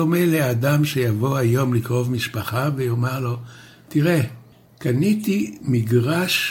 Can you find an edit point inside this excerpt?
no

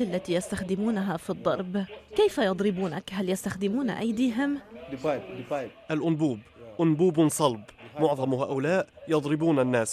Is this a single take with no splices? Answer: yes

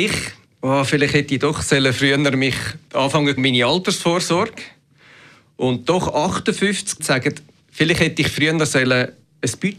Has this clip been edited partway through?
yes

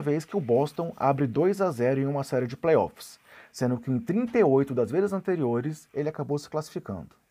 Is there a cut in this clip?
no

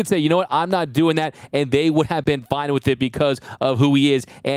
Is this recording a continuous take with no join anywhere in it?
yes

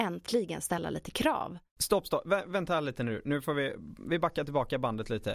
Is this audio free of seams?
yes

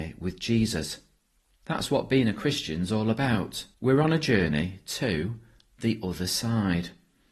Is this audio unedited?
no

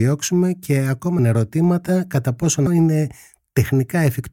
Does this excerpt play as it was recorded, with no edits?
no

